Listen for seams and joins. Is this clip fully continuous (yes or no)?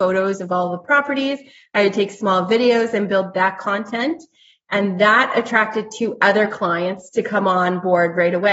yes